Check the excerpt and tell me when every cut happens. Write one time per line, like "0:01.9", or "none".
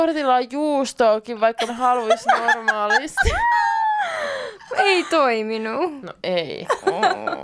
0:01.7